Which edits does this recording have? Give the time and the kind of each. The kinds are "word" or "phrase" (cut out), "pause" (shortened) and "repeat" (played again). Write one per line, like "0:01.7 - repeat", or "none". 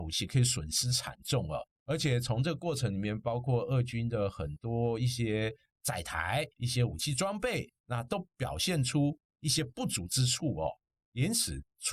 0:06.5 - pause
0:07.8 - pause